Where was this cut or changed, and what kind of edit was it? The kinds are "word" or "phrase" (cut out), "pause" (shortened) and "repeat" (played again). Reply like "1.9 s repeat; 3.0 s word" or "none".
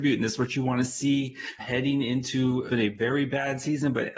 1.6 s word; 2.7 s word